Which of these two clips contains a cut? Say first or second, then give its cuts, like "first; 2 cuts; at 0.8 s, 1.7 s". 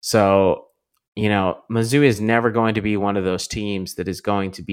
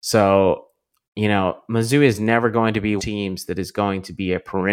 second; 1 cut; at 3.0 s